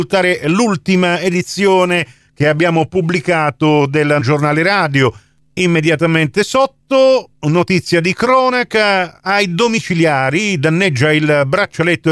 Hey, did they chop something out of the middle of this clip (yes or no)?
yes